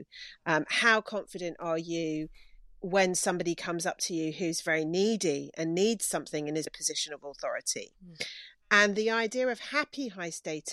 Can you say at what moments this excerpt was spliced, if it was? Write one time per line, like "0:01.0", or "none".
0:06.7